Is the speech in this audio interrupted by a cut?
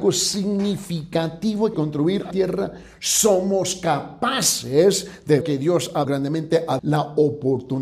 yes; 5 cuts; at 1.7 s, 2.3 s, 5.4 s, 6.0 s, 6.8 s

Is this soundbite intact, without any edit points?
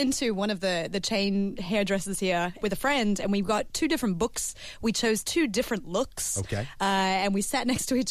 no; 1 cut; at 2.6 s

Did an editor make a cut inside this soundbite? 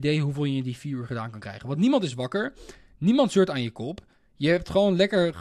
no; 0 cuts

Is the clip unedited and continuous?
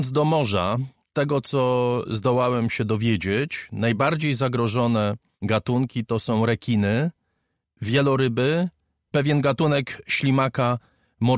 no; 2 cuts; at 1.1 s, 9.1 s

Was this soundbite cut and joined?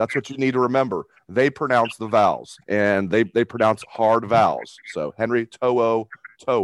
yes; 1 cut; at 2.6 s

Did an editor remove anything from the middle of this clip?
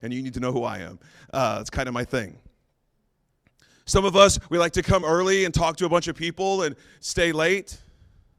no; 0 cuts

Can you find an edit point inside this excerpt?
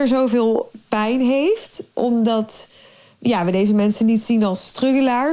no; 0 cuts

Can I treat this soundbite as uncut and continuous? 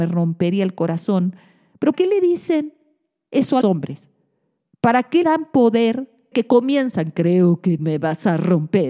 no; 5 cuts; at 1.9 s, 3.6 s, 5.2 s, 6.3 s, 7.8 s

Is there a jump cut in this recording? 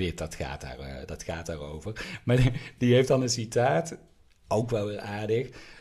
no; 0 cuts

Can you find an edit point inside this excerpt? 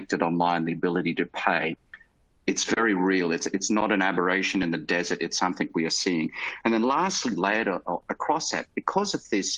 no; 0 cuts

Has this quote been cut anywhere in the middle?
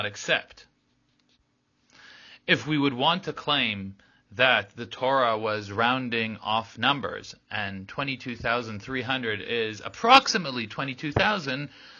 no; 0 cuts

